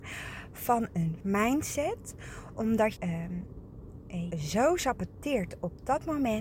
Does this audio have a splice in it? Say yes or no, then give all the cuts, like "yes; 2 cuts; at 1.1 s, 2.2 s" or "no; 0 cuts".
yes; 3 cuts; at 1.2 s, 3.0 s, 4.3 s